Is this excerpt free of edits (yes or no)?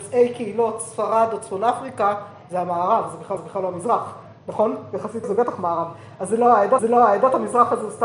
no